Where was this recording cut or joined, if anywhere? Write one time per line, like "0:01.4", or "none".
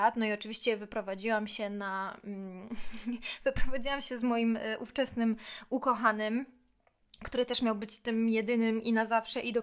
none

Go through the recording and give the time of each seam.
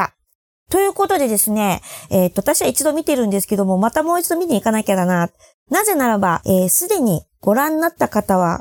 0:06.4

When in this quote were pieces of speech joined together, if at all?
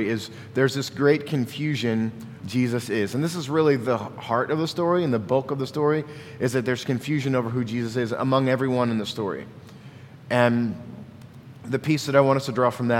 0:02.4

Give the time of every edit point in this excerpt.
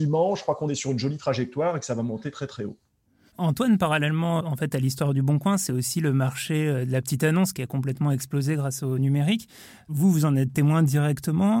0:04.4

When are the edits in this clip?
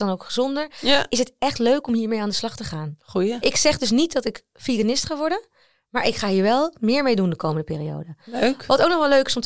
none

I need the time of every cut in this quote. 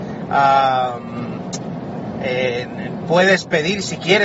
none

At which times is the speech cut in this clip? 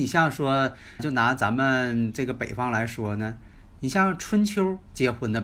0:01.0

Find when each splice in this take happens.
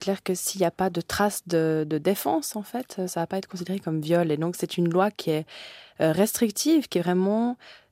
none

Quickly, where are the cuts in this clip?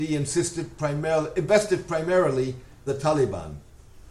0:02.9

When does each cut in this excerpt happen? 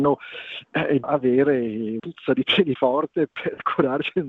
0:01.0
0:02.0
0:02.8

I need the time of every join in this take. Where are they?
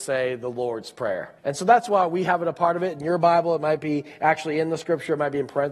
0:01.4

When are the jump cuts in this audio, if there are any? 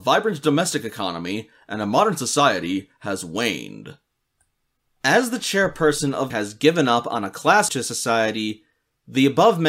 0:06.3
0:07.7

